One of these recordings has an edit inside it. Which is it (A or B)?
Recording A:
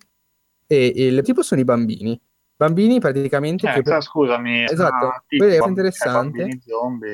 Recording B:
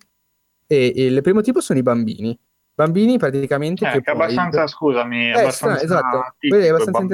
A